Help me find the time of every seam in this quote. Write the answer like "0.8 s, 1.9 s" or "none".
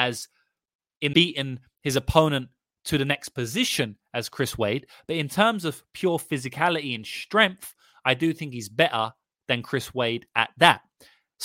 1.1 s